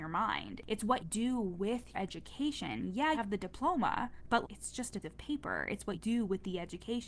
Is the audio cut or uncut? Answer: cut